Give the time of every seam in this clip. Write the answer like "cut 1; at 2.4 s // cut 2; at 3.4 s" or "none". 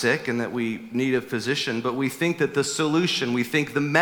none